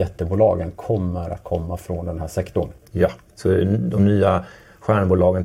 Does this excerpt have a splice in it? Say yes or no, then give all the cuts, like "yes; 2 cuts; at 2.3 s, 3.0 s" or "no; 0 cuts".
no; 0 cuts